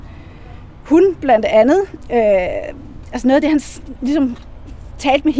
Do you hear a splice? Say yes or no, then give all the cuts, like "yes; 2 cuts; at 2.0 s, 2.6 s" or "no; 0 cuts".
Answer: no; 0 cuts